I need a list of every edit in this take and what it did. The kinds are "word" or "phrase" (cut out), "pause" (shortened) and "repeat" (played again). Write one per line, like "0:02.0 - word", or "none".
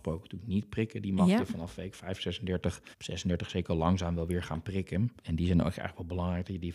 0:02.9 - pause
0:05.2 - pause